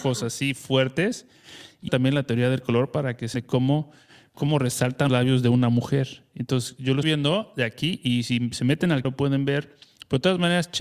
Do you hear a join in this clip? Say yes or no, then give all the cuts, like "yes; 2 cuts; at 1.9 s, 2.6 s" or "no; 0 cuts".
yes; 6 cuts; at 1.9 s, 3.3 s, 4.3 s, 5.1 s, 7.0 s, 9.0 s